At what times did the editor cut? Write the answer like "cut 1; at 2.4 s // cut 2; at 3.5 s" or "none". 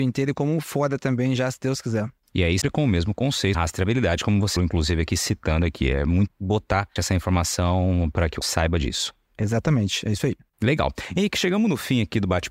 cut 1; at 1.4 s // cut 2; at 2.6 s // cut 3; at 3.5 s // cut 4; at 4.6 s // cut 5; at 6.3 s // cut 6; at 7.0 s // cut 7; at 8.4 s